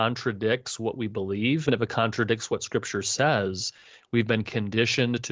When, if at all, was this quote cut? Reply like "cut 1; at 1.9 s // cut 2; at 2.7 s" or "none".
cut 1; at 1.7 s